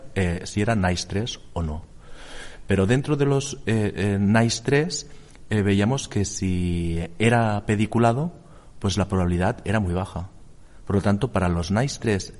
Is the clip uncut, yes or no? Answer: yes